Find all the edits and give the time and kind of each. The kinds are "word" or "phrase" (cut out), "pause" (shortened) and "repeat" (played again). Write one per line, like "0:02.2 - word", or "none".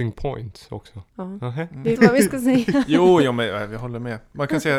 0:01.1 - pause
0:02.0 - phrase